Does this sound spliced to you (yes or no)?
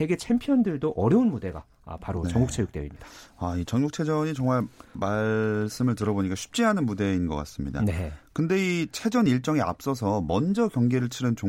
no